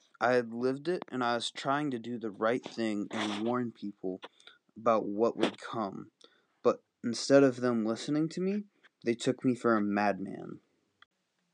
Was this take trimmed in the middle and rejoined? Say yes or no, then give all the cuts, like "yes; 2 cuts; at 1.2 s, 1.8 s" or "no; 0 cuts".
no; 0 cuts